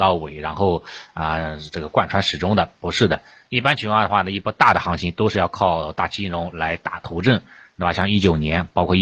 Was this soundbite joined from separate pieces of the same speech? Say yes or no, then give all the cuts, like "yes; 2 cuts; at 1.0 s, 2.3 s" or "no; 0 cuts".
no; 0 cuts